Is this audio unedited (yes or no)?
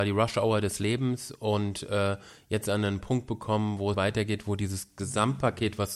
no